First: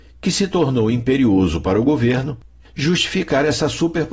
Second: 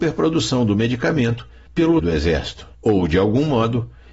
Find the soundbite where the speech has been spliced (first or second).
second